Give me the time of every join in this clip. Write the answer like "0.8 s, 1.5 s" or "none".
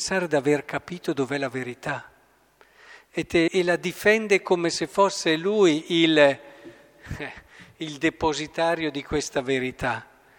3.5 s